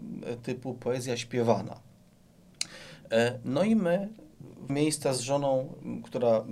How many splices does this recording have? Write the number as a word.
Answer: one